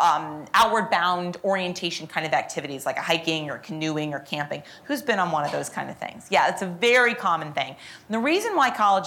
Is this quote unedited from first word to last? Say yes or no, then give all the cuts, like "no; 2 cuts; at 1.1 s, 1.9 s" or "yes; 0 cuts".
yes; 0 cuts